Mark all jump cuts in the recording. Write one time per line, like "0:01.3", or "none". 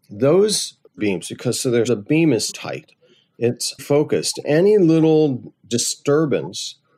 0:01.0
0:01.9
0:02.5
0:03.8
0:04.4